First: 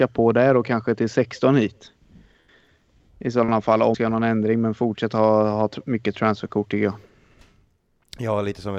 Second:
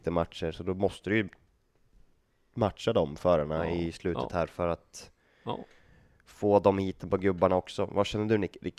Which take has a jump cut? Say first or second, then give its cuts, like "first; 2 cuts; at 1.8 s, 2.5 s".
first; 1 cut; at 3.9 s